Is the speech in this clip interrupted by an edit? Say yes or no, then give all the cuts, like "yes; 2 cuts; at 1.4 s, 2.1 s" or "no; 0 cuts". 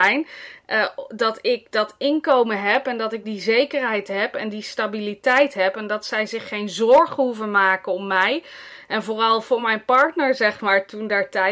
no; 0 cuts